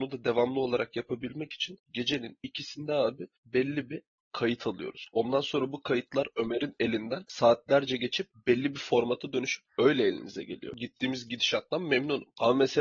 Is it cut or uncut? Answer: uncut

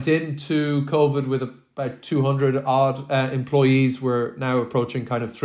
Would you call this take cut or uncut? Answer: uncut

